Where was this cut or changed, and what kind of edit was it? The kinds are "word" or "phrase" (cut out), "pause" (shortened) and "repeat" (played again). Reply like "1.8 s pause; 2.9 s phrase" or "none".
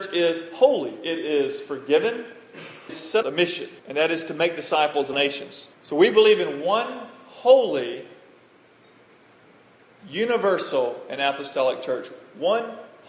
2.9 s phrase; 3.2 s phrase; 3.8 s pause; 5.1 s word; 5.7 s pause